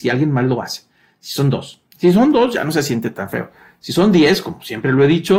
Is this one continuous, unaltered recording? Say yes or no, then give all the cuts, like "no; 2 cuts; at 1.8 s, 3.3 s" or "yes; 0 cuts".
no; 1 cut; at 1.9 s